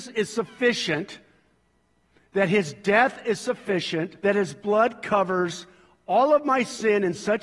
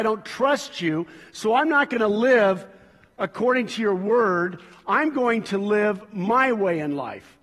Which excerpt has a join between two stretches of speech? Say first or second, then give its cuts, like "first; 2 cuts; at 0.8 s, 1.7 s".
first; 1 cut; at 4.2 s